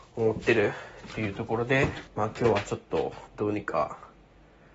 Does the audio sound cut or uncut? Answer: cut